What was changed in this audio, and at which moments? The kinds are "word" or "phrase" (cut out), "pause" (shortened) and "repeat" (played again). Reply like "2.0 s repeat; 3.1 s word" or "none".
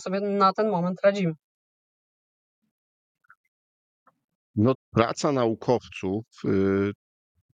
4.7 s phrase